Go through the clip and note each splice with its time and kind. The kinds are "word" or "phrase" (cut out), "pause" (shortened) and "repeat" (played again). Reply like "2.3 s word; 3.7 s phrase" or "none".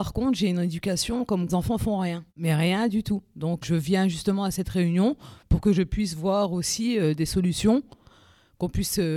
1.5 s phrase; 2.3 s pause; 3.6 s word